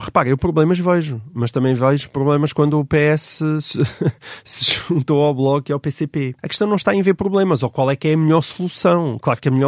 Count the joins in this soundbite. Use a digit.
1